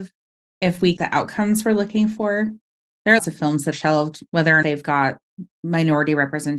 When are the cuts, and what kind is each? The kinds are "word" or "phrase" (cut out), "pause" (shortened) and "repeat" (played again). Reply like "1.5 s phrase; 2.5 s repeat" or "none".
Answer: 1.0 s word; 3.2 s word; 3.7 s word; 4.6 s word